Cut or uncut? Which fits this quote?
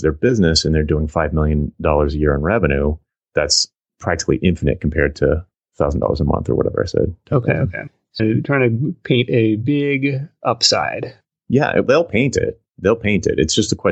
cut